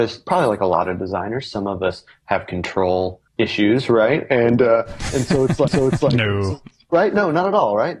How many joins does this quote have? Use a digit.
2